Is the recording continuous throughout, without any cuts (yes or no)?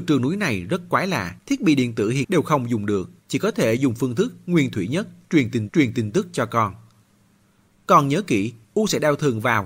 no